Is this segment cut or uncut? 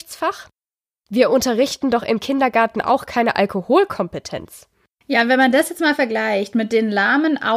uncut